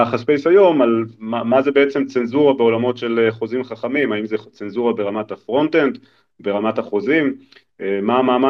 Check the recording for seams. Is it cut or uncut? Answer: uncut